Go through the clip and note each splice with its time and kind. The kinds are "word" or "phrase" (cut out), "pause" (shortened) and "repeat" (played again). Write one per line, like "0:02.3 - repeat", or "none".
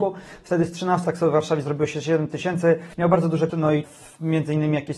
0:01.0 - word
0:02.9 - pause
0:03.5 - word
0:03.8 - word